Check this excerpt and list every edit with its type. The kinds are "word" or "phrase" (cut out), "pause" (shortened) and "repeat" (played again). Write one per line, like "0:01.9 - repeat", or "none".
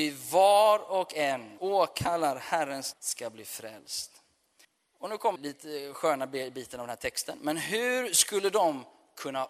0:01.6 - word
0:02.9 - word
0:04.6 - pause
0:05.4 - phrase